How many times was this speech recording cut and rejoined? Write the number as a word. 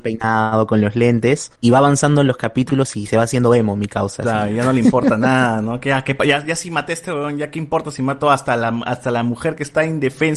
one